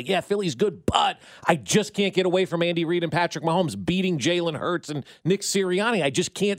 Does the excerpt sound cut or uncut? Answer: uncut